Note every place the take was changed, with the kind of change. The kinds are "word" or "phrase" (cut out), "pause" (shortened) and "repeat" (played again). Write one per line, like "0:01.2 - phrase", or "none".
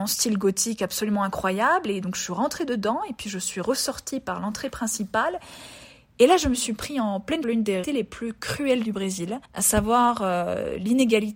0:07.4 - word
0:07.8 - word
0:09.4 - pause